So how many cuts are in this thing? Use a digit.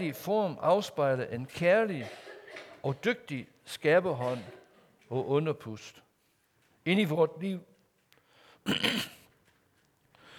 0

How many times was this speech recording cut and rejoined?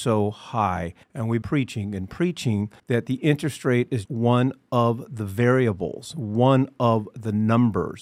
4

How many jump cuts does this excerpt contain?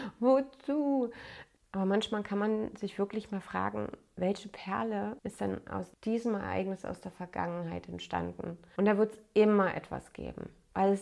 0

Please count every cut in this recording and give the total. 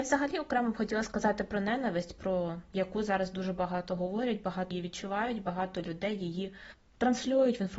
1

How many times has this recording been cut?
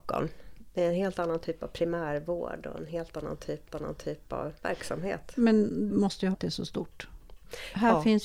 3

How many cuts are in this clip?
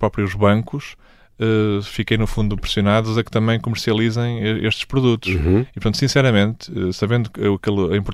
0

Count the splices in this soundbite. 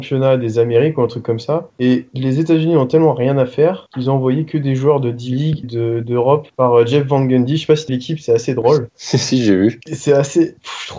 3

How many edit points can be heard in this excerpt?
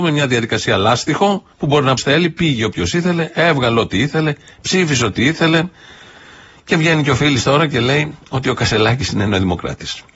2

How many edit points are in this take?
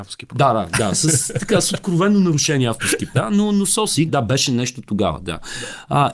2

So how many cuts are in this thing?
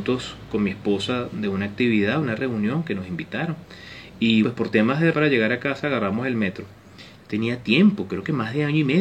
2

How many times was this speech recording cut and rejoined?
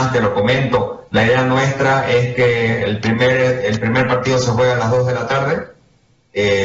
0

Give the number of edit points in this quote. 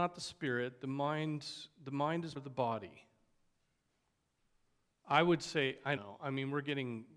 2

